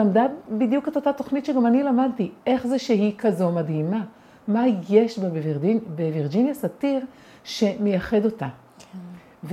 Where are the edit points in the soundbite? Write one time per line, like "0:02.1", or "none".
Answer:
none